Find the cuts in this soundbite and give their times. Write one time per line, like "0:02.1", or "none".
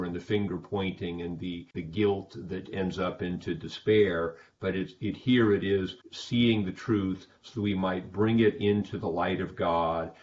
0:01.7
0:02.7
0:06.0